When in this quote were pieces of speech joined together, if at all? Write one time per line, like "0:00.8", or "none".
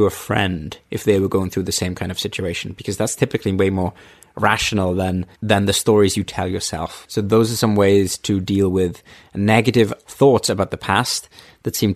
none